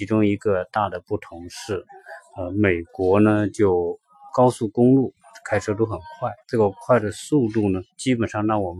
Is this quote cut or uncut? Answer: cut